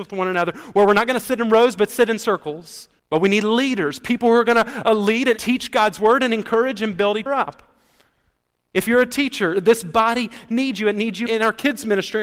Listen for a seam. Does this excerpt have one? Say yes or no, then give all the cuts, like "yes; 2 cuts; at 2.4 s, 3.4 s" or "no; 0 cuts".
yes; 4 cuts; at 3.0 s, 5.4 s, 7.3 s, 11.3 s